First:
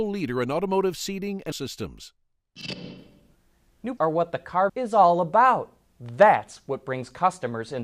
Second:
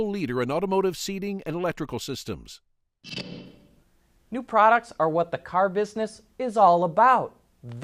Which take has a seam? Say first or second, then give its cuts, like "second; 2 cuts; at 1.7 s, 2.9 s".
first; 3 cuts; at 1.5 s, 4.0 s, 4.7 s